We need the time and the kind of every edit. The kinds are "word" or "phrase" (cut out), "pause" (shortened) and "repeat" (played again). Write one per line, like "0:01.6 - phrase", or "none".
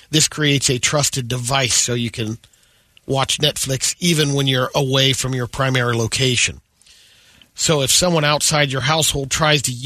none